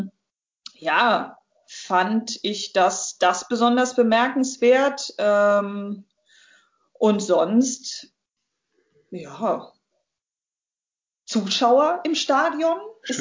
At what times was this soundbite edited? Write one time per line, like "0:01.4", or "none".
none

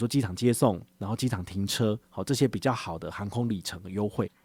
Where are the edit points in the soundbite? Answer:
0:02.0

